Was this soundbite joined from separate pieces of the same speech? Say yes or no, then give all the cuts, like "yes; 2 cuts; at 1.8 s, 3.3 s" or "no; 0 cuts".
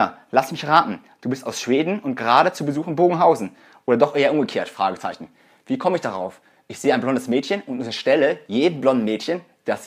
no; 0 cuts